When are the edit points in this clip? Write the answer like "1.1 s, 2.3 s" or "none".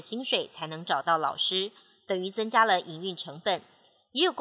none